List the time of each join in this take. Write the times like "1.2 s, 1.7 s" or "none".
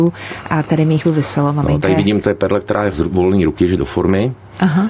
1.0 s, 2.2 s, 2.9 s, 3.8 s